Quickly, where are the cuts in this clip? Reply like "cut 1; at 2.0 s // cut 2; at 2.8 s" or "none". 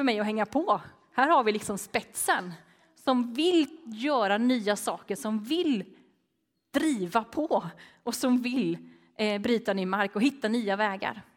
none